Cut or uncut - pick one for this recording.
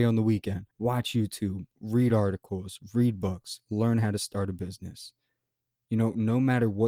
uncut